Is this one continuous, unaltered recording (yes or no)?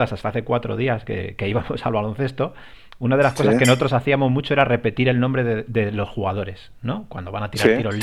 yes